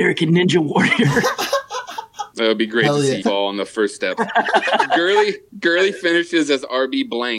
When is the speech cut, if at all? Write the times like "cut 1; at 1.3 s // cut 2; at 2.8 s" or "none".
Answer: cut 1; at 2.3 s // cut 2; at 3.2 s